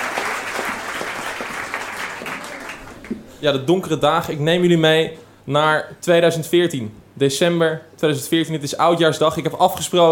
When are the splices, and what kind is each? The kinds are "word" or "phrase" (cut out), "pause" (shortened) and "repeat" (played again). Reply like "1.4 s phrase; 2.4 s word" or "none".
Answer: none